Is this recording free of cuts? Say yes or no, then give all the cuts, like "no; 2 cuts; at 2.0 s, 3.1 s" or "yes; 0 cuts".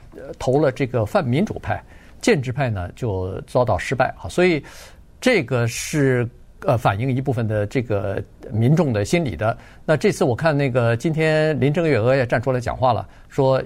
yes; 0 cuts